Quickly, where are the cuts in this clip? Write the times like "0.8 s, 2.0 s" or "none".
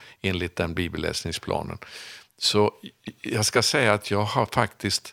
none